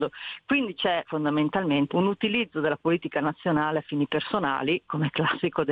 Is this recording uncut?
no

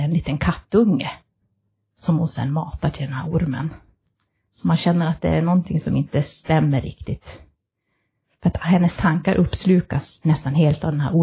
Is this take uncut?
yes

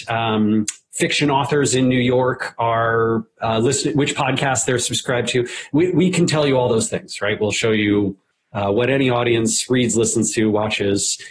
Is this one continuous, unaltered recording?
yes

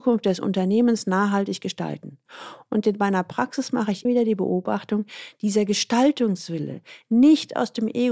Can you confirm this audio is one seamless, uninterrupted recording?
no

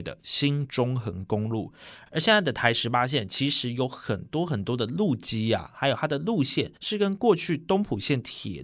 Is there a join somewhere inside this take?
yes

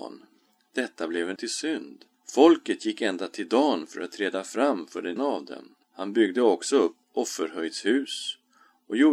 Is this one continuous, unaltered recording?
no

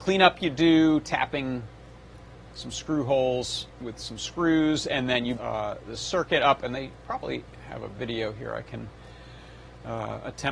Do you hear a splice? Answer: yes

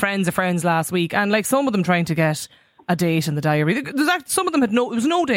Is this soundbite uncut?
yes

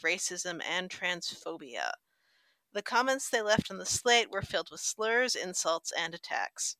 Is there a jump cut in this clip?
no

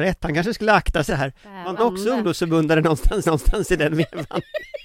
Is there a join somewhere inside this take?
yes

